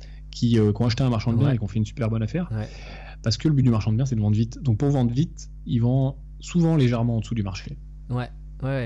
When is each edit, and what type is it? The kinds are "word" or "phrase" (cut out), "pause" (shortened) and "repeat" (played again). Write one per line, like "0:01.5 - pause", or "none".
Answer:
none